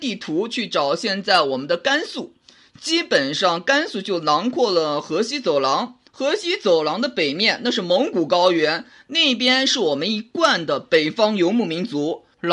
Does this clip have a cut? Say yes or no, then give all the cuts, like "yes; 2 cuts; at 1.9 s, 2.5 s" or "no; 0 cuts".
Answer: no; 0 cuts